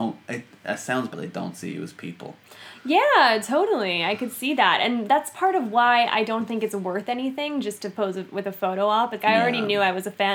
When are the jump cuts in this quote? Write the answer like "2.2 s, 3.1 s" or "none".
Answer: 1.1 s, 9.2 s